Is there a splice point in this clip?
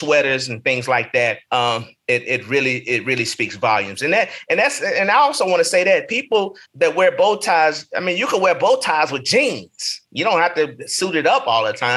yes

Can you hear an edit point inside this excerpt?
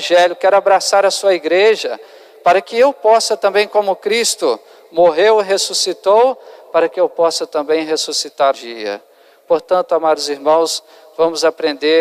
yes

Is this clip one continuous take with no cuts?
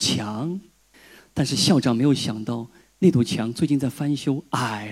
yes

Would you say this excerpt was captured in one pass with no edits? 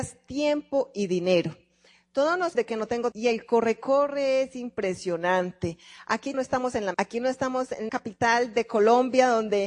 no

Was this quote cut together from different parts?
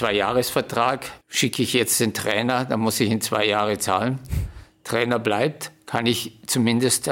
yes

